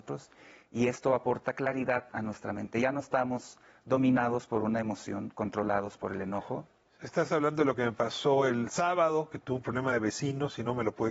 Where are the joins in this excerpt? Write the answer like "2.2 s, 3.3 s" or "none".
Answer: none